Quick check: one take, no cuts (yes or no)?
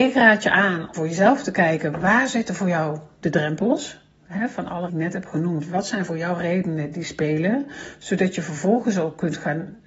no